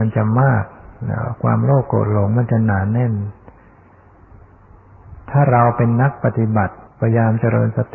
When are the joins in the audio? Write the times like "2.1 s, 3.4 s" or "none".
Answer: 6.9 s